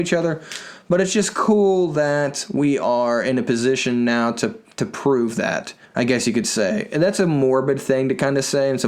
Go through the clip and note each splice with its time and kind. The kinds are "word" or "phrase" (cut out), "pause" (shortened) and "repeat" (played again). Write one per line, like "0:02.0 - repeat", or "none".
0:05.9 - pause